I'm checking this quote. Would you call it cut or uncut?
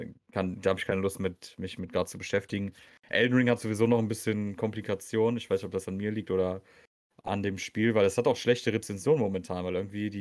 uncut